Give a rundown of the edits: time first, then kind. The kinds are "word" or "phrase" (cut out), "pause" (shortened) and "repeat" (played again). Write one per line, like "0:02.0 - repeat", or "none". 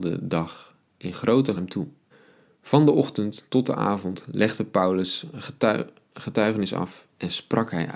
0:01.6 - phrase
0:02.1 - pause